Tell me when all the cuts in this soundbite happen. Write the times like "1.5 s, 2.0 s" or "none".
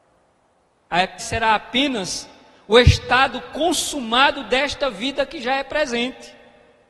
1.2 s